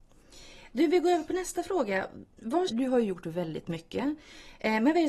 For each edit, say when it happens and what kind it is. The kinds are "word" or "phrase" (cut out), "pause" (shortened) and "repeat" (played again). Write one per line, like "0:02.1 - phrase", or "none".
0:02.7 - word